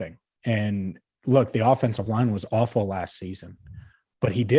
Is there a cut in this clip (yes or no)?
no